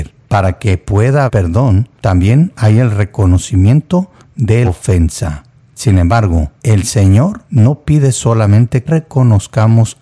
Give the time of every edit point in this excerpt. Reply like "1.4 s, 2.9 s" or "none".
1.3 s, 2.0 s, 4.6 s, 6.6 s, 7.5 s, 8.9 s